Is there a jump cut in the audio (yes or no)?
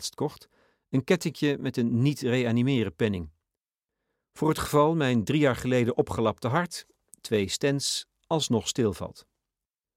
no